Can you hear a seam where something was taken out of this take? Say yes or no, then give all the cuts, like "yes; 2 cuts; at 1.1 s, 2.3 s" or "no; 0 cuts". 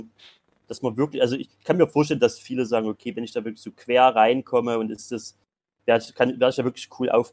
no; 0 cuts